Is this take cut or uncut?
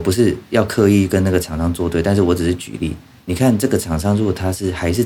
uncut